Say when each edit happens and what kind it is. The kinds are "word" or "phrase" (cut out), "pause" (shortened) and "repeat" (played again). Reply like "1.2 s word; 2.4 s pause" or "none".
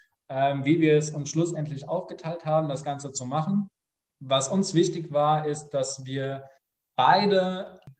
none